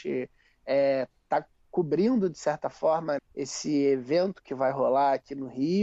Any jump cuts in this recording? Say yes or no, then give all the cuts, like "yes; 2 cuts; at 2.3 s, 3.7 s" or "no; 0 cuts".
yes; 1 cut; at 3.2 s